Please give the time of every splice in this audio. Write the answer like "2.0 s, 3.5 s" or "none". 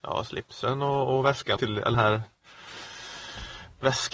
1.6 s, 1.9 s